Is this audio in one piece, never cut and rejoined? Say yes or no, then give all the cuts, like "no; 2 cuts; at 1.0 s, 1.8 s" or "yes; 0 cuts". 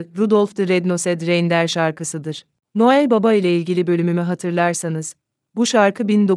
yes; 0 cuts